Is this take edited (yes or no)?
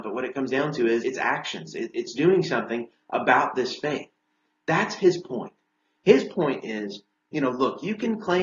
yes